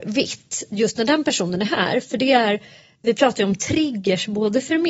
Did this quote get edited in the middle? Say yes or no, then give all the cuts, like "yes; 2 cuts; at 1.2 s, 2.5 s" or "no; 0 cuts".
no; 0 cuts